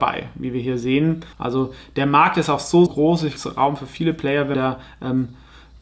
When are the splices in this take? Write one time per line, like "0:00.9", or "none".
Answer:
0:01.3
0:02.9
0:03.4
0:04.5